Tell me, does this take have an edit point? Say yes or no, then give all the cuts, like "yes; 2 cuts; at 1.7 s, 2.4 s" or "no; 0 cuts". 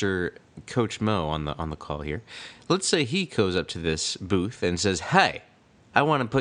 no; 0 cuts